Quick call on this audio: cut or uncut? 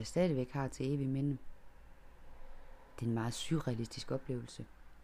uncut